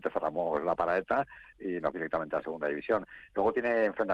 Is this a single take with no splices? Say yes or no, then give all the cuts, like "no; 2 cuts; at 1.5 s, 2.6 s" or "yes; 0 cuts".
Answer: no; 2 cuts; at 1.5 s, 1.9 s